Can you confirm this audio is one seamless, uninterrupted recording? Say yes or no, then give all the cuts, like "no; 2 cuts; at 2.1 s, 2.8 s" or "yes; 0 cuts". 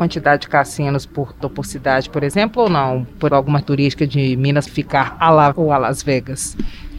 no; 5 cuts; at 1.4 s, 3.3 s, 3.6 s, 4.7 s, 5.5 s